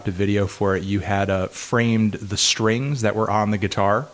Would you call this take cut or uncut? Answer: uncut